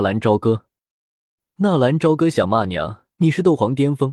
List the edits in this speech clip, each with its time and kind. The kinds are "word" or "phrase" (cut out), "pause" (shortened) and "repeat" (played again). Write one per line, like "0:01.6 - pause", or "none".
0:03.1 - pause